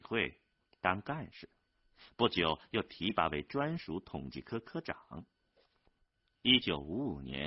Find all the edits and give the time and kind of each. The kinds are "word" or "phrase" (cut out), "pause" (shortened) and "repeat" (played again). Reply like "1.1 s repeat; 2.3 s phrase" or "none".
none